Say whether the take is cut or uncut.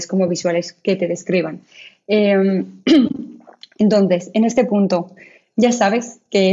uncut